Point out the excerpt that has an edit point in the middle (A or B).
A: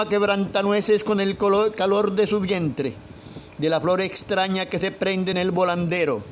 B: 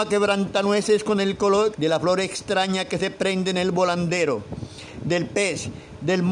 B